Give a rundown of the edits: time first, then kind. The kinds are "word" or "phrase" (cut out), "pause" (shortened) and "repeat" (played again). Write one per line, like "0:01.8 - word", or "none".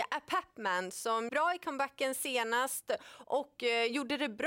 0:01.3 - word